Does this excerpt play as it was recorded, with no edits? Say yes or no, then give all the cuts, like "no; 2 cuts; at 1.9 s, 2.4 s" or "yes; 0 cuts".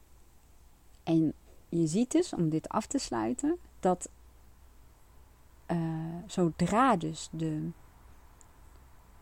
no; 1 cut; at 3.7 s